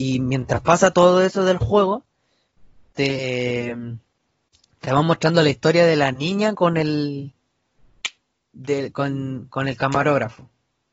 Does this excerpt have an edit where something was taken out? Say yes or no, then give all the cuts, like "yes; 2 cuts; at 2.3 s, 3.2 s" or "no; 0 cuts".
no; 0 cuts